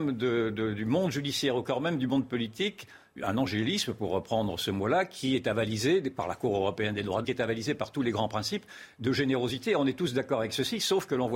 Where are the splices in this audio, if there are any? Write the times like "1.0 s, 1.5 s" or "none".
3.2 s, 7.2 s